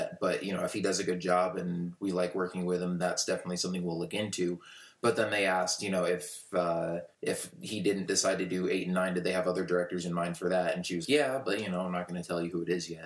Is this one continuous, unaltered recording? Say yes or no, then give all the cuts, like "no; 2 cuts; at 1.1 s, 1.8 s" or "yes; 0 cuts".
no; 3 cuts; at 3.0 s, 7.1 s, 11.0 s